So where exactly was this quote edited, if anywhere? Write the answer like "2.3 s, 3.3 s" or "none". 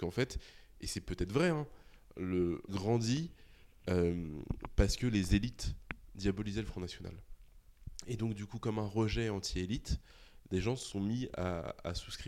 2.7 s